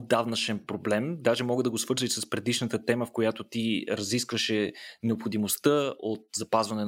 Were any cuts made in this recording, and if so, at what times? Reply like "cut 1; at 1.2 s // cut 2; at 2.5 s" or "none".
none